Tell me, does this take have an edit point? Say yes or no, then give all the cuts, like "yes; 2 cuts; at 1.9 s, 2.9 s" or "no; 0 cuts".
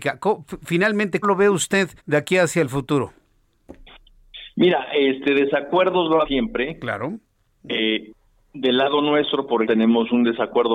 yes; 4 cuts; at 1.2 s, 2.0 s, 6.2 s, 9.7 s